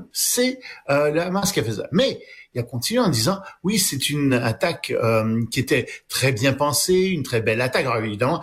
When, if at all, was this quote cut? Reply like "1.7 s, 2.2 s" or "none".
none